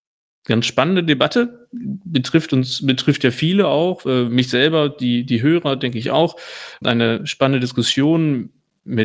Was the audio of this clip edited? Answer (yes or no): no